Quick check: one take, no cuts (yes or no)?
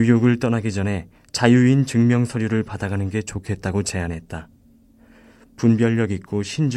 yes